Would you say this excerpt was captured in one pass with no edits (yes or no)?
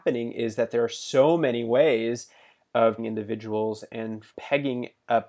no